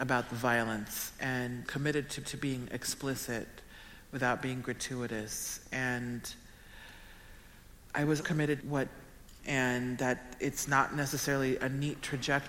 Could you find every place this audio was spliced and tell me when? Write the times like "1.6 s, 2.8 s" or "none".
1.7 s, 2.2 s, 8.2 s, 8.6 s, 9.4 s